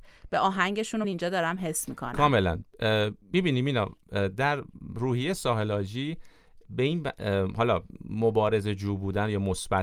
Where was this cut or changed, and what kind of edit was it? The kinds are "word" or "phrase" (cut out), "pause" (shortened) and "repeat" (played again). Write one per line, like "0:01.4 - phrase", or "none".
0:01.0 - word
0:03.2 - pause